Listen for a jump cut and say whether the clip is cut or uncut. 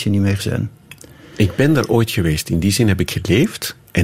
uncut